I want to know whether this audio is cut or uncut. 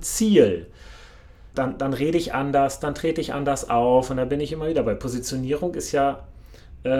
cut